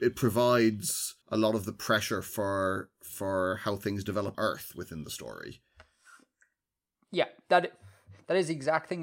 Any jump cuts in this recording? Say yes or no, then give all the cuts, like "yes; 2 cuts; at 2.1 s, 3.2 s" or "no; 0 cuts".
yes; 2 cuts; at 1.2 s, 4.3 s